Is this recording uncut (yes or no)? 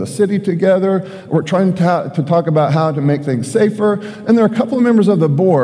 yes